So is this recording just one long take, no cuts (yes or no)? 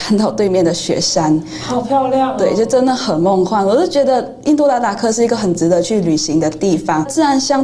yes